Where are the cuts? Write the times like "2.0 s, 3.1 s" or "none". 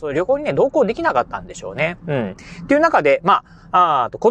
none